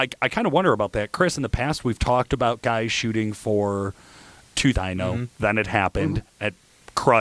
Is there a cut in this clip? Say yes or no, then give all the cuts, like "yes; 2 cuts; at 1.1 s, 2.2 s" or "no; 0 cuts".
yes; 1 cut; at 4.7 s